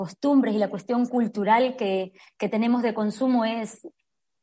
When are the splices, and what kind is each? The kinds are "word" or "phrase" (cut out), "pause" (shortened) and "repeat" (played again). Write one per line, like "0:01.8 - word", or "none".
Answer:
none